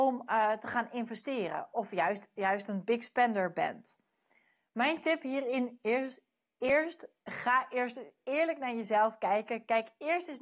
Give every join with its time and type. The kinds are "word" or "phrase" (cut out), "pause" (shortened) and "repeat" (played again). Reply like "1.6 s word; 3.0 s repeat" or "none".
none